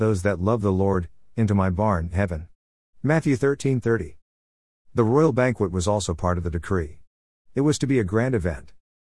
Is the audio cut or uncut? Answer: uncut